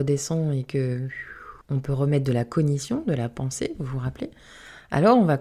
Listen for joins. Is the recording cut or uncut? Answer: cut